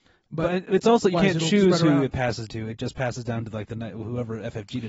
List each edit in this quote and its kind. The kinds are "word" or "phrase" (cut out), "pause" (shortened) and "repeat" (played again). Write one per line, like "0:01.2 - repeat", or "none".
0:01.1 - word
0:02.5 - word